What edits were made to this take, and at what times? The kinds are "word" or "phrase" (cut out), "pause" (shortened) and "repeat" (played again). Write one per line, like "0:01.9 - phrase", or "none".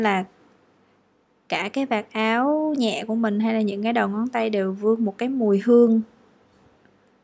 none